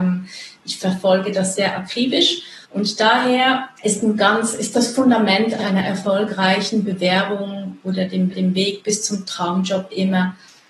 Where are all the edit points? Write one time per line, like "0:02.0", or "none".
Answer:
0:01.6
0:02.6
0:03.8
0:05.6
0:08.3